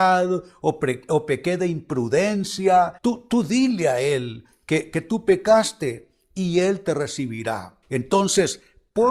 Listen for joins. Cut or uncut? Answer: cut